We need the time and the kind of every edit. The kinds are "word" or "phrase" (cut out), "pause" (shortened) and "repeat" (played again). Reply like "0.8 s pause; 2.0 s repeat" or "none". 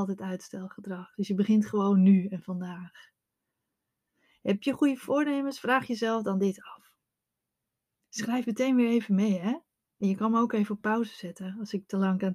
none